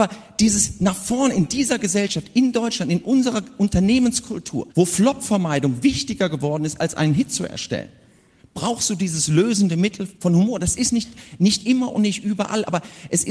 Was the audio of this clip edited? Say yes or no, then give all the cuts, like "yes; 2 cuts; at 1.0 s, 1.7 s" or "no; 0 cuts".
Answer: yes; 2 cuts; at 4.7 s, 10.2 s